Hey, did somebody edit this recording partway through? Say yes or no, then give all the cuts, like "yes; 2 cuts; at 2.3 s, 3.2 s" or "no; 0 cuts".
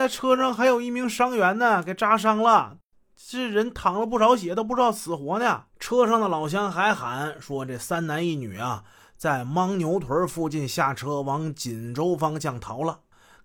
yes; 1 cut; at 5.7 s